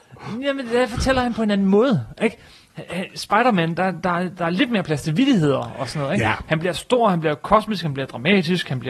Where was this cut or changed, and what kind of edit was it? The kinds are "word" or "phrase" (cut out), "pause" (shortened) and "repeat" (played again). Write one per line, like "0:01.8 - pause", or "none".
none